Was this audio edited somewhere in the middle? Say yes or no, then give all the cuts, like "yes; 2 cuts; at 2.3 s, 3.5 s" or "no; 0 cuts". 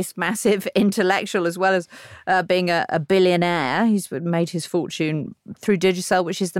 no; 0 cuts